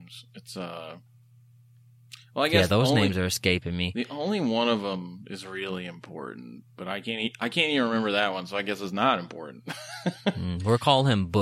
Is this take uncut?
yes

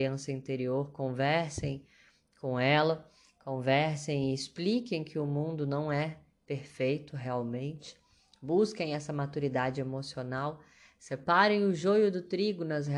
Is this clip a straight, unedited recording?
yes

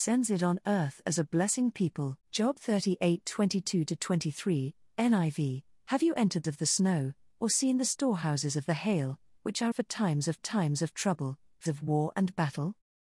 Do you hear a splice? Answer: yes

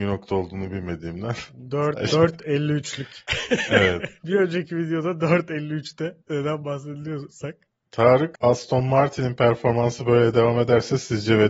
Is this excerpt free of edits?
yes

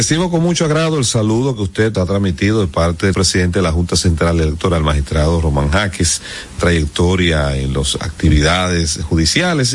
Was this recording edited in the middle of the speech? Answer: yes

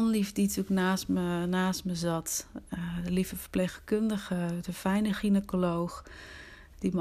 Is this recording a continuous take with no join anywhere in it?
yes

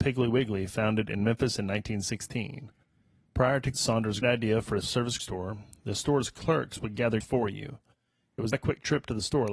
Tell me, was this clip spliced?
yes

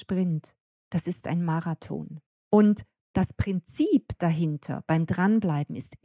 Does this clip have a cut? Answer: yes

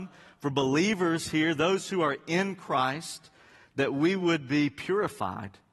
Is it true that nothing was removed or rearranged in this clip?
yes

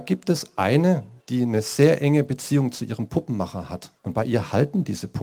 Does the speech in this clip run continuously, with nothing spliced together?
no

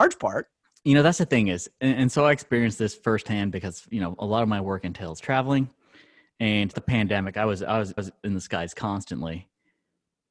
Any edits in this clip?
yes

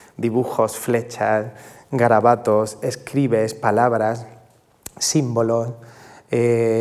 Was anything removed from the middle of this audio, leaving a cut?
no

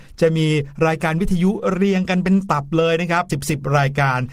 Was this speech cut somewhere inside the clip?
yes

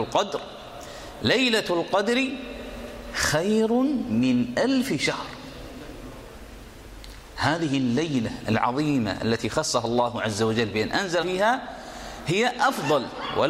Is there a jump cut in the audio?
yes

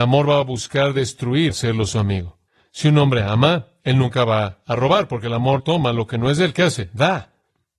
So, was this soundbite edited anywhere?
yes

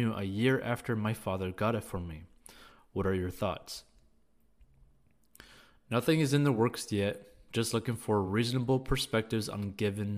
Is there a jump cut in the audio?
no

